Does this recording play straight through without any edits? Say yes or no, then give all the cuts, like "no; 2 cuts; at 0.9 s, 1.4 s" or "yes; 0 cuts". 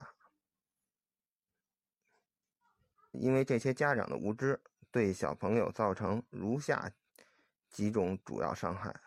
no; 1 cut; at 3.1 s